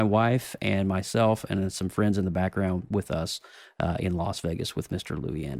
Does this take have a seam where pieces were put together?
no; 0 cuts

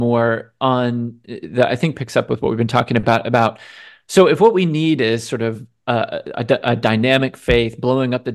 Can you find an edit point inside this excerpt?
no; 0 cuts

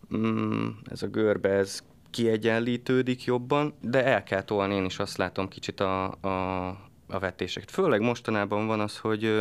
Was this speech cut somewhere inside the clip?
no; 0 cuts

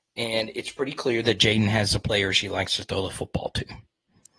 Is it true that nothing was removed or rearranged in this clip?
yes; 0 cuts

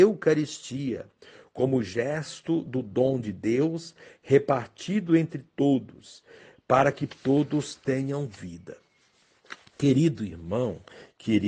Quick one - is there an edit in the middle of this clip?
no; 0 cuts

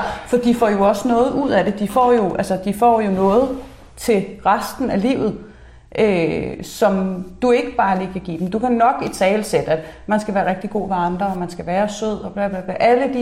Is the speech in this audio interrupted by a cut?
no; 0 cuts

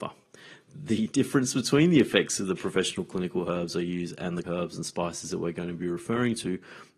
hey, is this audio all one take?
no; 1 cut; at 4.4 s

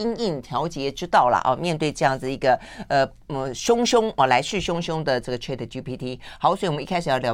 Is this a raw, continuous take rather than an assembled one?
yes; 0 cuts

